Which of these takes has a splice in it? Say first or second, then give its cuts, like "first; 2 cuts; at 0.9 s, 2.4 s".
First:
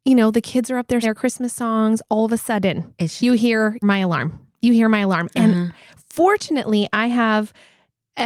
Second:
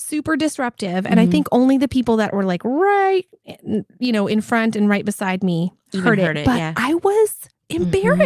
first; 3 cuts; at 1.0 s, 3.2 s, 3.8 s